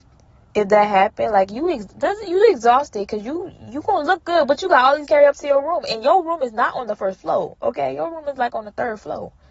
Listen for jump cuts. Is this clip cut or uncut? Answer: cut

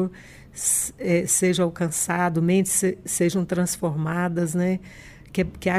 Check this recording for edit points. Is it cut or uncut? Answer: uncut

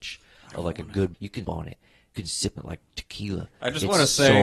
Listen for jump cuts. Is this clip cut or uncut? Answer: cut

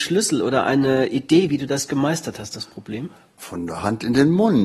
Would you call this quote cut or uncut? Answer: uncut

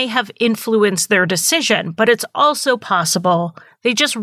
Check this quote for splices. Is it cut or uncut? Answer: uncut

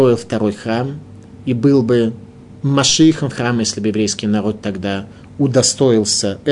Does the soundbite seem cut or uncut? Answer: cut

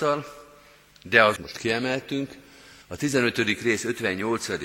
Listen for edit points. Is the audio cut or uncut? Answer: cut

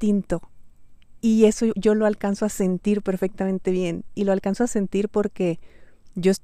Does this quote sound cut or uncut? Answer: uncut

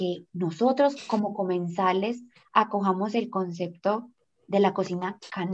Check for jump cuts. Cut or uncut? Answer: uncut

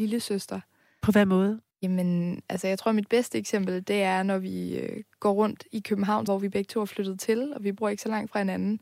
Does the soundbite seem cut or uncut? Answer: cut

